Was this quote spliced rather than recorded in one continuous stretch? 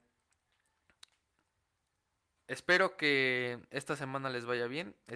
yes; 1 cut; at 3.7 s

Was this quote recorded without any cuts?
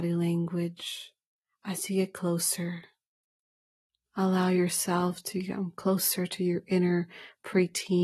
yes; 0 cuts

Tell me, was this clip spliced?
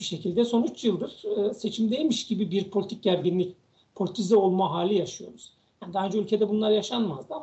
no; 0 cuts

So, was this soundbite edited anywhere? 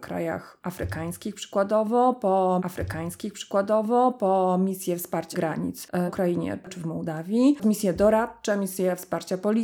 yes; 4 cuts; at 2.6 s, 5.3 s, 6.1 s, 7.6 s

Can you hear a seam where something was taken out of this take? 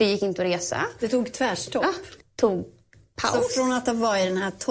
yes; 1 cut; at 2.2 s

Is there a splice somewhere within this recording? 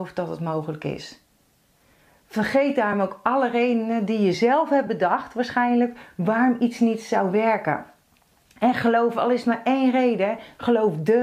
no; 0 cuts

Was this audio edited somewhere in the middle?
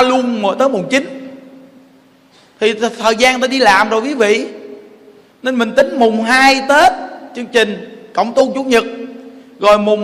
no; 0 cuts

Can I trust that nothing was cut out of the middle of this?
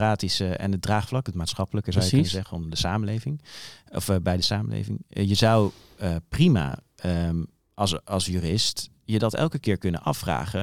yes; 0 cuts

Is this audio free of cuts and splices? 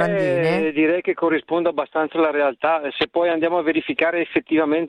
yes; 0 cuts

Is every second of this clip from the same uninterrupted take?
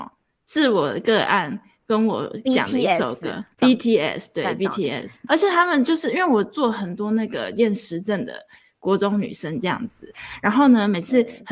no; 1 cut; at 5.3 s

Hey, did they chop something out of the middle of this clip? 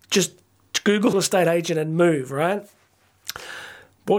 yes; 1 cut; at 1.1 s

